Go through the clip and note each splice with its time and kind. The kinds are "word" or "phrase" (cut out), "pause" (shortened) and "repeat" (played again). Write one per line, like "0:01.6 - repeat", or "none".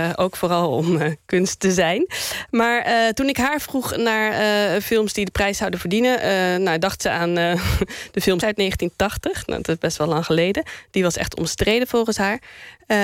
0:08.4 - word